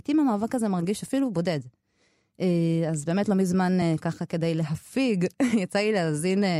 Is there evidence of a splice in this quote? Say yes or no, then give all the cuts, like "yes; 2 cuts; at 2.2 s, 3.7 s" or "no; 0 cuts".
no; 0 cuts